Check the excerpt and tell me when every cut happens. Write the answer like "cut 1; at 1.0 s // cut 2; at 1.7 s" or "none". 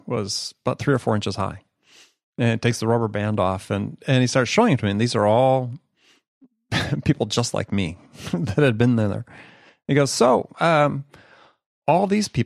none